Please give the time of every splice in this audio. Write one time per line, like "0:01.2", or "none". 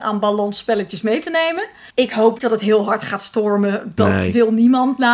0:01.9
0:02.4